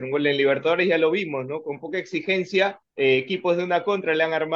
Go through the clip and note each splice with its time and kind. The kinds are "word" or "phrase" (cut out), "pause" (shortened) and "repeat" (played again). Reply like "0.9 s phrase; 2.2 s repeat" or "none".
2.9 s pause

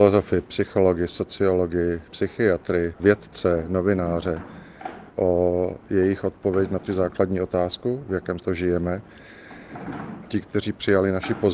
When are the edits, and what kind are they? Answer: 5.1 s word; 6.9 s word; 8.4 s word

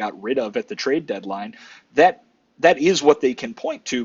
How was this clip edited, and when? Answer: none

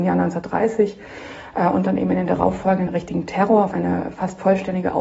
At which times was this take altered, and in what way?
2.9 s word; 3.7 s word

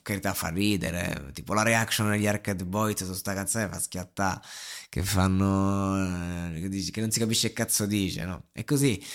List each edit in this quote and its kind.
none

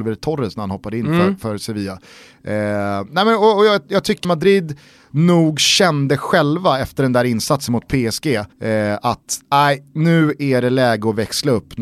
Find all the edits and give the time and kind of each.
4.2 s phrase; 8.5 s pause

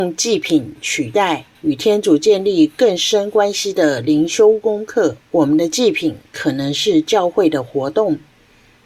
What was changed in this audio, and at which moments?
1.6 s pause; 5.2 s pause; 6.3 s pause

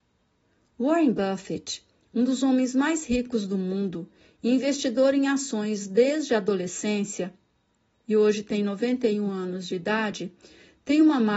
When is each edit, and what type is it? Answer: none

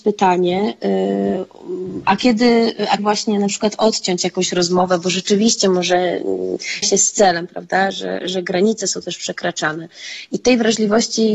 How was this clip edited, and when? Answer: 3.0 s word; 6.8 s word

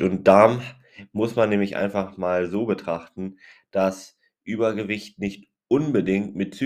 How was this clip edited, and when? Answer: none

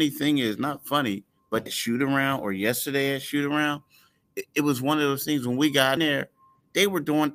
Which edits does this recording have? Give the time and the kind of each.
1.7 s word; 6.0 s word

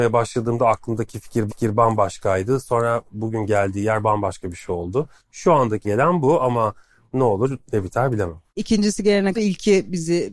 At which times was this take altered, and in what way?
1.5 s repeat; 5.8 s word; 8.5 s pause; 9.3 s word

